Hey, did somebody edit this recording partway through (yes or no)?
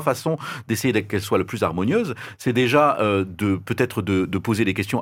no